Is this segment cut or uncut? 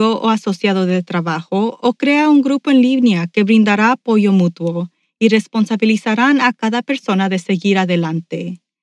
uncut